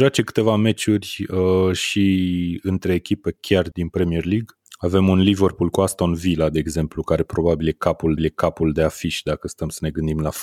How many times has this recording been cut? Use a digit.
3